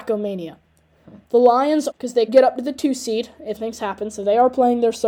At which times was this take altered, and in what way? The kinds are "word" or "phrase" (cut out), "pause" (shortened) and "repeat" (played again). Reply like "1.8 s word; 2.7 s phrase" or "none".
1.2 s pause; 1.9 s word; 2.3 s word; 3.6 s word